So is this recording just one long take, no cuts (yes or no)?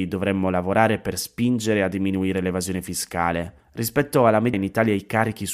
no